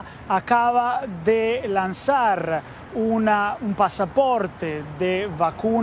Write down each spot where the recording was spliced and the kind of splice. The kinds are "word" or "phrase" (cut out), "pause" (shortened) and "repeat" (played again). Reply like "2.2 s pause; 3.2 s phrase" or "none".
none